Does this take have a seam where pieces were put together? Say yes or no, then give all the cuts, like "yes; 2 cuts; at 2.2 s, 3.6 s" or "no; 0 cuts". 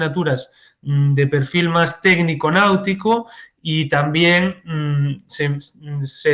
no; 0 cuts